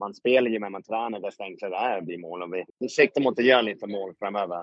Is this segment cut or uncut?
cut